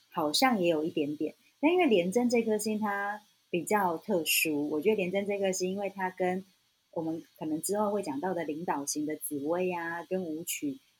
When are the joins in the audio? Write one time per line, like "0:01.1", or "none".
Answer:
none